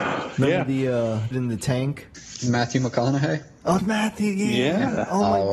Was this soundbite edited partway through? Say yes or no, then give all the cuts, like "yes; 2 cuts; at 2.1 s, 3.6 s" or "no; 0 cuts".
yes; 2 cuts; at 1.3 s, 3.8 s